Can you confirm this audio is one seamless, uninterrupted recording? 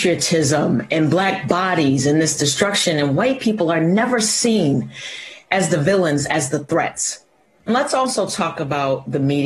no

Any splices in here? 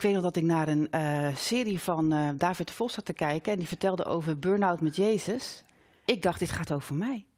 no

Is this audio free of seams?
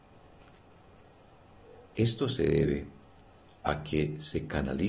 yes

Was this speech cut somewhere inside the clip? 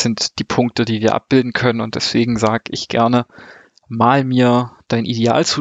no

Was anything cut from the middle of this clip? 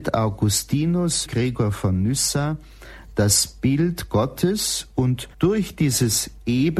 yes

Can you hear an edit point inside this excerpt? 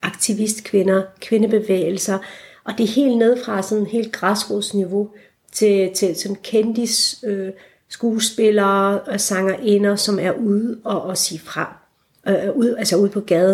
no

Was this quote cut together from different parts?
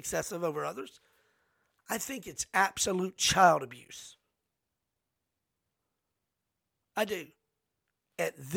no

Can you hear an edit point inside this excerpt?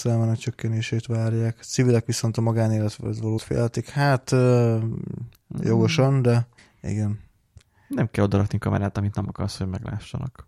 yes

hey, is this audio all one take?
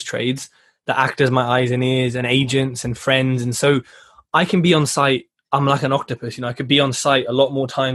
yes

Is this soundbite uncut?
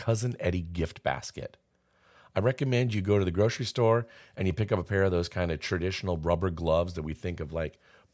yes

